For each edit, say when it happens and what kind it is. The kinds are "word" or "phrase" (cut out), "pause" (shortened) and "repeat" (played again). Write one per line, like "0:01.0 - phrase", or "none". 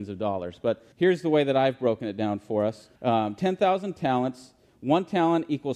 0:00.9 - pause
0:03.0 - pause